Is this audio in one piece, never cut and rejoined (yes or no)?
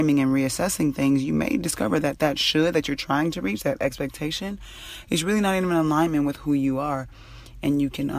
yes